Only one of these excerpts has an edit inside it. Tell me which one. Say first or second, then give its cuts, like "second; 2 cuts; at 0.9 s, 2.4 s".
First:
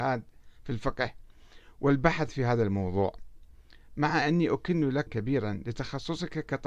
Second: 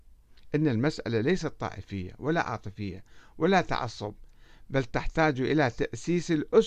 first; 1 cut; at 5.1 s